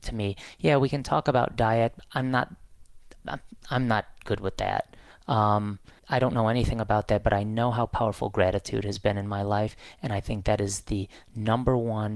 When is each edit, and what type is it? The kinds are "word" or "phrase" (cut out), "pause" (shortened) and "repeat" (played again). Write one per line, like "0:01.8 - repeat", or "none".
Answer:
0:06.0 - pause